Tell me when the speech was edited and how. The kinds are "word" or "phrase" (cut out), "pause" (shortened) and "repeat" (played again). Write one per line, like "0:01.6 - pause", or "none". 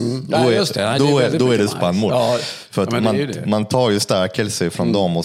none